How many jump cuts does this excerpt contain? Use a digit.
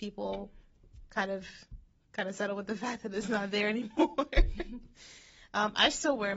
0